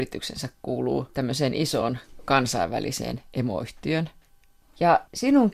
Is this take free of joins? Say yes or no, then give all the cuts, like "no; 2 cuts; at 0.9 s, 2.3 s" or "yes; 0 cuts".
yes; 0 cuts